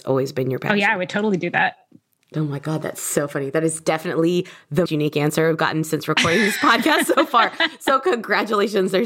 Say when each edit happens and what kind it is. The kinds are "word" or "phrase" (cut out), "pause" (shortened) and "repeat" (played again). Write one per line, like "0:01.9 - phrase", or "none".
0:04.9 - word